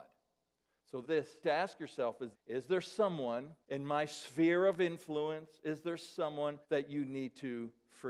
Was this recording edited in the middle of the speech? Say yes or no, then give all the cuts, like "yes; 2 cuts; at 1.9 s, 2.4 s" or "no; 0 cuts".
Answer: yes; 5 cuts; at 1.0 s, 1.4 s, 2.3 s, 3.6 s, 6.6 s